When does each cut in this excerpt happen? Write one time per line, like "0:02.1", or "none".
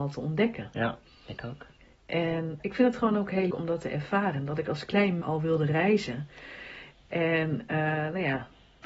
0:02.6
0:03.5
0:05.2